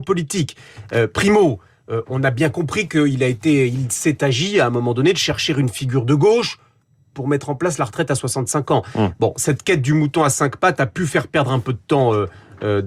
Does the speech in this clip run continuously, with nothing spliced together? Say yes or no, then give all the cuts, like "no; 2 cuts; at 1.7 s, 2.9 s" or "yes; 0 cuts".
yes; 0 cuts